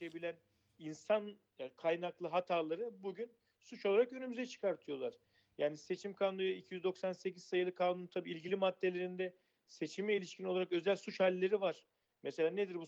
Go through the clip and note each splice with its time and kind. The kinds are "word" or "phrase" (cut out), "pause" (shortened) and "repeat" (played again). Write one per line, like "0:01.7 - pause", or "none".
none